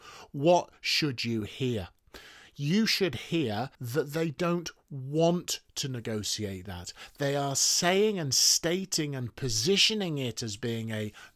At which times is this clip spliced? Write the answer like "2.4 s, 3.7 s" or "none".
3.7 s